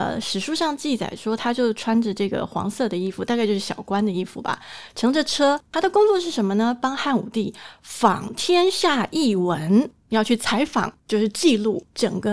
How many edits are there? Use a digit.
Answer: 1